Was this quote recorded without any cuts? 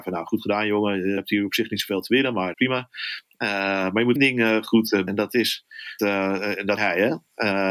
no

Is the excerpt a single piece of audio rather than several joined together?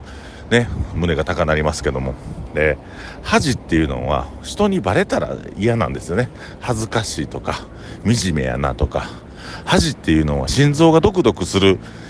no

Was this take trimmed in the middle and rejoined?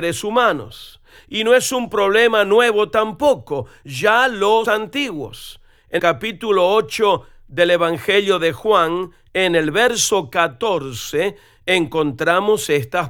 yes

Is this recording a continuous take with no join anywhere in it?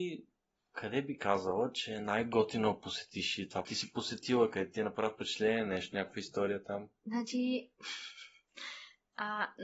no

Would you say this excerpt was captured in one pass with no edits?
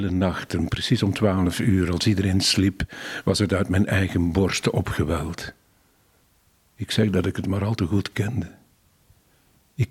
no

